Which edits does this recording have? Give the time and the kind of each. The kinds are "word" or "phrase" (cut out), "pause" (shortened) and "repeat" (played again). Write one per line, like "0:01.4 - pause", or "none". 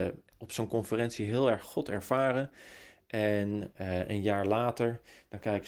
none